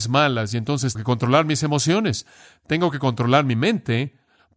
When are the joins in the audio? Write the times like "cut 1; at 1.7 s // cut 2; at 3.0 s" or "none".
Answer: cut 1; at 0.9 s